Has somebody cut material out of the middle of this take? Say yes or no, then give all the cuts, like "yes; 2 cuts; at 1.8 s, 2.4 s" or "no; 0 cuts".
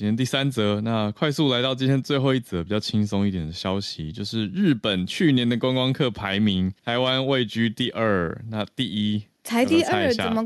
yes; 1 cut; at 6.8 s